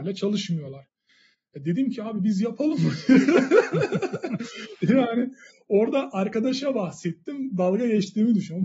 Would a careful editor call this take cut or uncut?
uncut